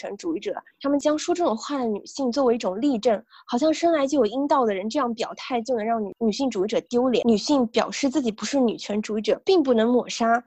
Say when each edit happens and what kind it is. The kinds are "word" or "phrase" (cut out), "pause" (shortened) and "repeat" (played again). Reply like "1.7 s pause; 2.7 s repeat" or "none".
none